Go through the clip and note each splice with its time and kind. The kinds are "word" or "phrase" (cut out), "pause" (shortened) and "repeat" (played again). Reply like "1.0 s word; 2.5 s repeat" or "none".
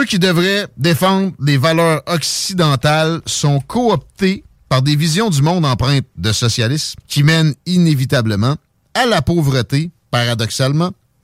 7.0 s pause; 7.6 s pause